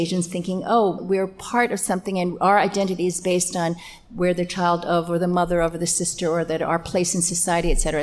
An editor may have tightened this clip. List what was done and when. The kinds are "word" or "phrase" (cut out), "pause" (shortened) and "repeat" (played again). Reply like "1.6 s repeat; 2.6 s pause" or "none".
1.0 s word

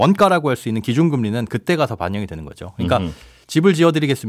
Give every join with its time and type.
none

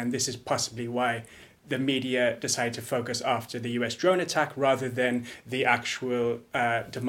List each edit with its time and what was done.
none

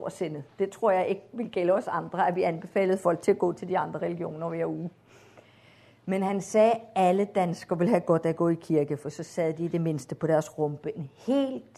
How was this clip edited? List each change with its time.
none

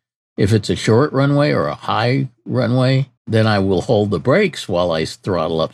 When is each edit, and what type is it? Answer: 3.2 s pause

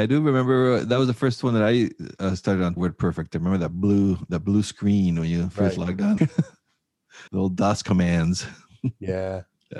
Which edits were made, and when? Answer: 2.8 s phrase; 6.2 s word; 7.3 s pause

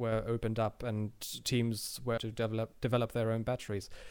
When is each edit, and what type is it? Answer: 2.2 s word

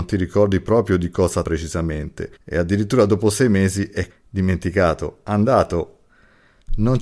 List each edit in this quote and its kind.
1.4 s word; 2.4 s pause; 4.1 s word

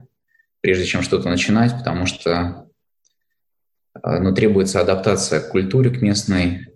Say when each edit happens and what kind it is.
none

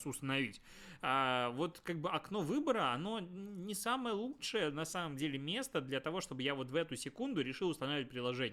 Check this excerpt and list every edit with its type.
none

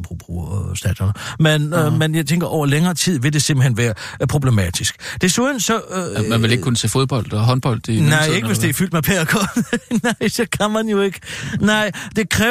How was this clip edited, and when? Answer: none

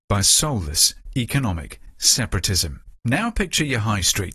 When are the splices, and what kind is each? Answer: 3.0 s pause

